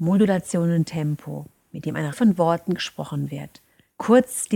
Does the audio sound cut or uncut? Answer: cut